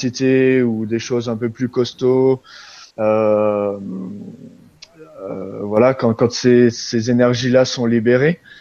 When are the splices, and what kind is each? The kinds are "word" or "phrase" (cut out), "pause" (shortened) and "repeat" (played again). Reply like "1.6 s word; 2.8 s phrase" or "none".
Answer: 2.9 s pause